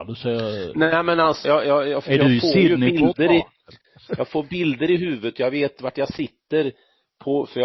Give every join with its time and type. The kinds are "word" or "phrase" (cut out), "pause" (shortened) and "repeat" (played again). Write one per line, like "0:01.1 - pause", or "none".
0:01.4 - word